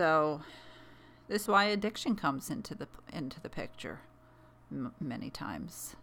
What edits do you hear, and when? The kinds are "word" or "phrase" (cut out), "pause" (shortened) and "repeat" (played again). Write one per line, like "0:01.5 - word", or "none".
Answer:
0:01.5 - word